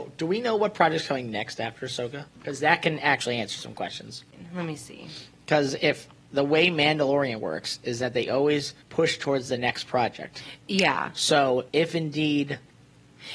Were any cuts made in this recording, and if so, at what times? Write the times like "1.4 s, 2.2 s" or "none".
2.3 s, 8.8 s, 10.6 s, 11.7 s